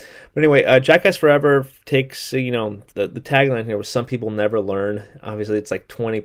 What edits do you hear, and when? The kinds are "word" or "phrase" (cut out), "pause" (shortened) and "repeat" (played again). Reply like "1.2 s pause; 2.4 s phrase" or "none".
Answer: 2.9 s pause